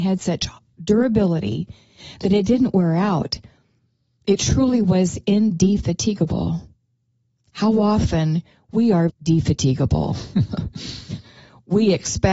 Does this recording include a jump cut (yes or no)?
yes